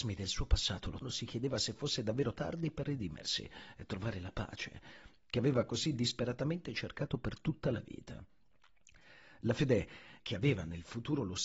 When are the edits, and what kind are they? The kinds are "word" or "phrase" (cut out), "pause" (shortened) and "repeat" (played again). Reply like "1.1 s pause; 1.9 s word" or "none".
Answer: 1.0 s word; 2.4 s word; 10.2 s word

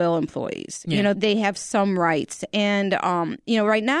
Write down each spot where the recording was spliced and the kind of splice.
1.1 s word

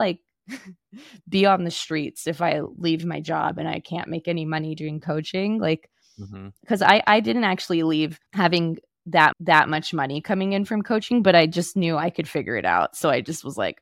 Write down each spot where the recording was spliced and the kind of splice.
8.3 s pause; 9.3 s repeat

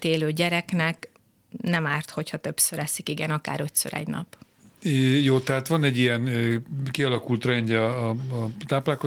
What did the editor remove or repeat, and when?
none

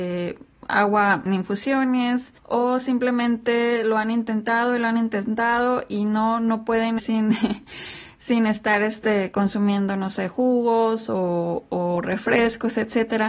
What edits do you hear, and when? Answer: 1.3 s word; 2.4 s pause; 7.0 s phrase

